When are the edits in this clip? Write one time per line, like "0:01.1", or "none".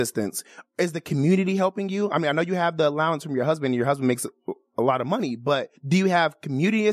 0:05.8